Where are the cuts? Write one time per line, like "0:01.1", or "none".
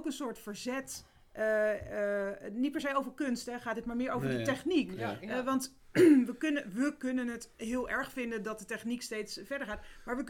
none